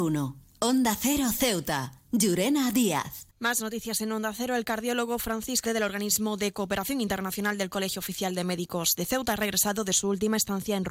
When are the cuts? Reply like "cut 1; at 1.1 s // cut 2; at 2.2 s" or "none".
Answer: cut 1; at 3.3 s // cut 2; at 5.6 s